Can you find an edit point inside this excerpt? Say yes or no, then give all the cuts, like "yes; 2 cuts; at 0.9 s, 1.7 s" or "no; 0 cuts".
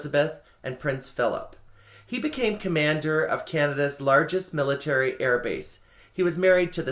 no; 0 cuts